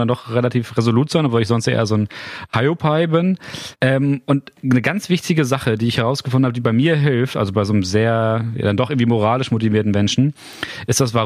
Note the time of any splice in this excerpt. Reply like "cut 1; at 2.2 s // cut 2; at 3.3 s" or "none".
cut 1; at 3.8 s

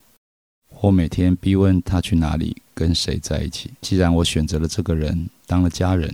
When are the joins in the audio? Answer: cut 1; at 3.8 s

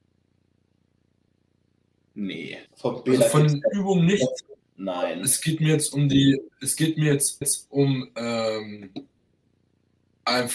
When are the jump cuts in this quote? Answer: cut 1; at 2.7 s // cut 2; at 4.6 s // cut 3; at 6.5 s // cut 4; at 7.4 s

